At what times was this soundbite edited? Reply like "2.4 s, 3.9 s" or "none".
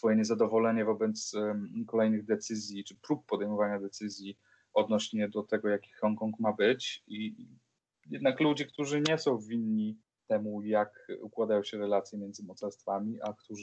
none